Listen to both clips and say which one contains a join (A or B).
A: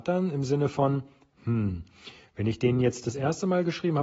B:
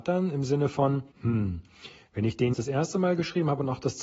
B